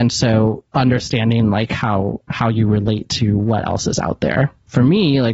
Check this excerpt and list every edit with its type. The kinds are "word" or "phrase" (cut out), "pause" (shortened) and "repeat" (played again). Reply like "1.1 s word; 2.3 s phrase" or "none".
none